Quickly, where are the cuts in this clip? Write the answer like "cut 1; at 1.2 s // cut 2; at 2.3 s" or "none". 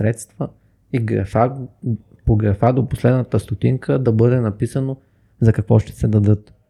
none